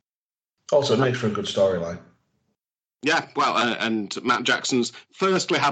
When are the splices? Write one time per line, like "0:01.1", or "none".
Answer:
none